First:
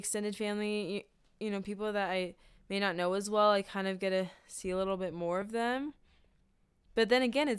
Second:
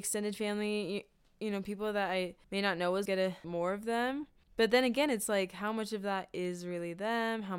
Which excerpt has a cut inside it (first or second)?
second